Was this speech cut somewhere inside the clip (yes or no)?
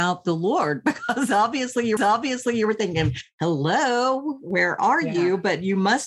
yes